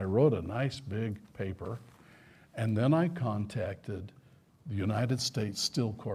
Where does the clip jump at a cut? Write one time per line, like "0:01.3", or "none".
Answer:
none